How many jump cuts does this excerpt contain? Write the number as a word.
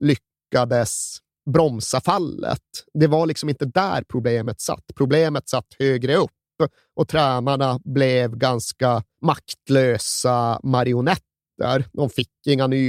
zero